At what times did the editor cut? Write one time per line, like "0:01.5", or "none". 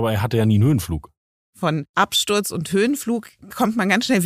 none